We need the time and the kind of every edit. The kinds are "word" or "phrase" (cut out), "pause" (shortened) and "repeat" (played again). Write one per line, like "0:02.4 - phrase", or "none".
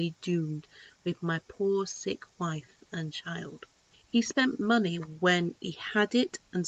none